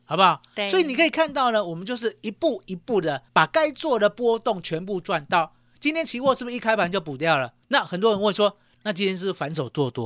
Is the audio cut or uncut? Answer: cut